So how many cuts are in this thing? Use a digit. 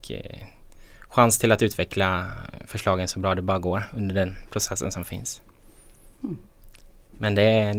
0